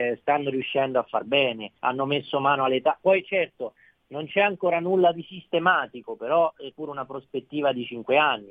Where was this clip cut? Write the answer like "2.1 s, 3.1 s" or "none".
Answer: 1.8 s, 6.7 s